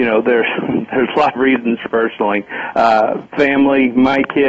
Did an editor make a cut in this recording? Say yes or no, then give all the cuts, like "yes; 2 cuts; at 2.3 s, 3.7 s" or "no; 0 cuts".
yes; 2 cuts; at 1.4 s, 1.9 s